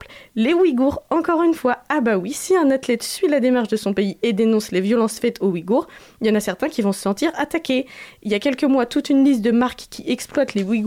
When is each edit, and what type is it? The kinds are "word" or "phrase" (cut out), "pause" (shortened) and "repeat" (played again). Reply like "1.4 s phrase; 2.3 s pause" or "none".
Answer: none